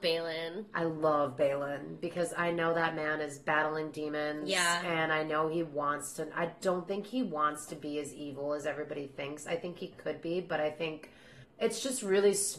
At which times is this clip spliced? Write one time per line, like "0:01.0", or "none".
0:11.4